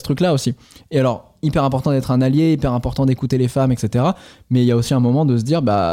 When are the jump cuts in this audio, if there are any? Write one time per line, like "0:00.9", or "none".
none

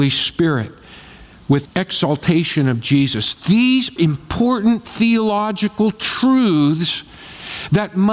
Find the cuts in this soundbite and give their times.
0:01.6
0:04.0

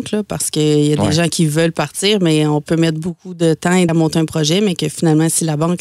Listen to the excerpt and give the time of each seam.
0:03.9

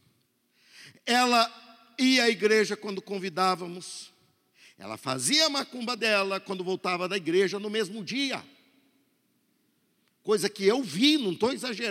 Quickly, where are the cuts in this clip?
none

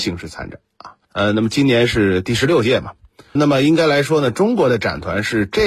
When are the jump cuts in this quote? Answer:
0:01.0
0:03.4

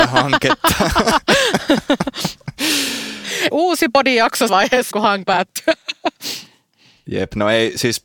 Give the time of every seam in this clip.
0:03.5
0:04.5
0:04.9
0:05.2

